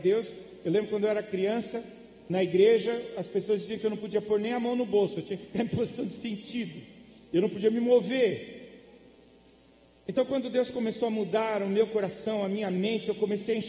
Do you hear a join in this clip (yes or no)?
no